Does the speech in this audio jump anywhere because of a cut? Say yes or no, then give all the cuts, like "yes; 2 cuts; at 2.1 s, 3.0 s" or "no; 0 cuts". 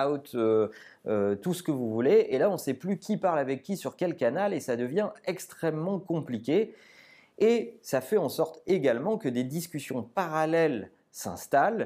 no; 0 cuts